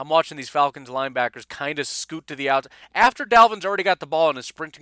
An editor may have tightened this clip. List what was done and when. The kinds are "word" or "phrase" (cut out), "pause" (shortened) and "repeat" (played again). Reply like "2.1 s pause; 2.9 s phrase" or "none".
none